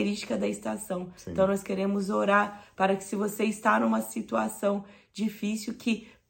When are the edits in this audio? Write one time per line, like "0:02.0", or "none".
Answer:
none